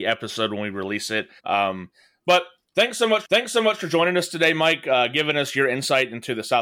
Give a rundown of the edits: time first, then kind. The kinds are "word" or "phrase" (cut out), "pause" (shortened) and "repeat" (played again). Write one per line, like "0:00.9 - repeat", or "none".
0:01.4 - pause
0:03.2 - repeat